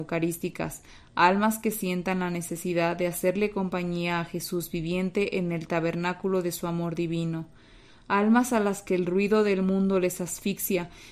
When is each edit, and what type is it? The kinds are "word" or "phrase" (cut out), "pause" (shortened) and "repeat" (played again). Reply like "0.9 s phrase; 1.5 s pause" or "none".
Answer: none

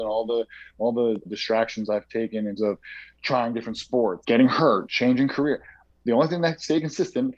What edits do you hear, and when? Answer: 1.3 s word; 2.6 s word; 4.2 s word; 4.9 s word

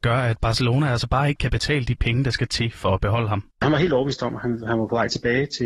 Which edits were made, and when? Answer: 3.5 s pause

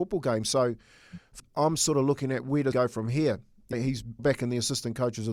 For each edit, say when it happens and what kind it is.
1.4 s word; 2.7 s word; 3.7 s word; 4.2 s word

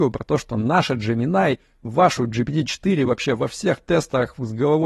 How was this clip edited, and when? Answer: none

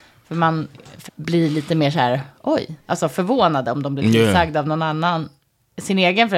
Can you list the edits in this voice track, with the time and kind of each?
1.1 s phrase

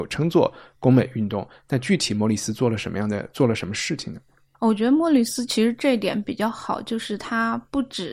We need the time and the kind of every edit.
none

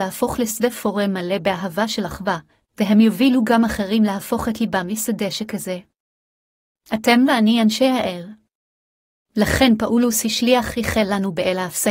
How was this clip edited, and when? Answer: none

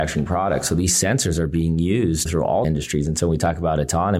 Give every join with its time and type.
2.3 s word; 2.6 s word

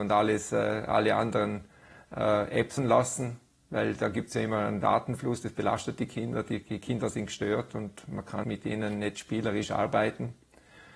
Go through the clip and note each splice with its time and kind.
2.8 s word; 8.4 s word

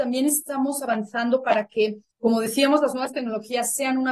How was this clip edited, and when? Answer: 2.1 s pause

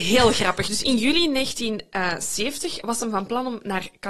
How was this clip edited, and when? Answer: none

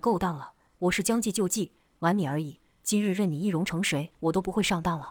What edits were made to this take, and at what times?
4.1 s pause

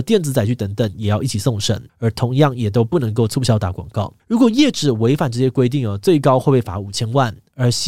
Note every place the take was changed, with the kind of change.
1.9 s pause; 4.2 s pause

